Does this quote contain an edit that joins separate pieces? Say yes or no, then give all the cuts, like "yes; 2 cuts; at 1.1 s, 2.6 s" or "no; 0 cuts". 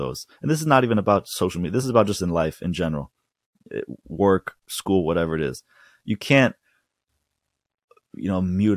no; 0 cuts